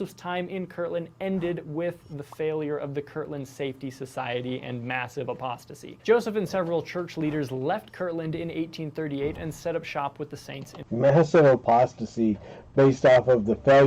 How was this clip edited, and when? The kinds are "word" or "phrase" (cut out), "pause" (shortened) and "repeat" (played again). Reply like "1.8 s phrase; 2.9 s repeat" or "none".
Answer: 6.0 s pause; 10.9 s pause